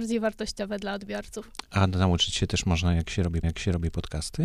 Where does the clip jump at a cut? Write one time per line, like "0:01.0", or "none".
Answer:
0:03.4

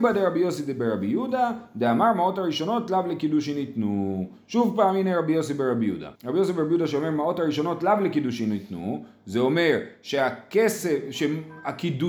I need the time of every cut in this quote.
0:06.2

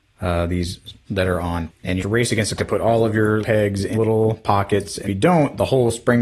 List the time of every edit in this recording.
0:01.1
0:01.7
0:02.0
0:02.6
0:03.4
0:03.9
0:05.1

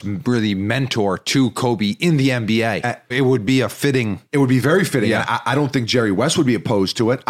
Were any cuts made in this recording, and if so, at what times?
0:03.1
0:04.3

